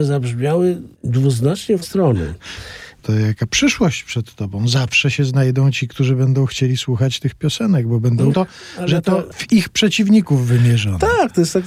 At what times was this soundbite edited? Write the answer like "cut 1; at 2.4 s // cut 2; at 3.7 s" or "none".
cut 1; at 0.9 s // cut 2; at 1.8 s // cut 3; at 8.3 s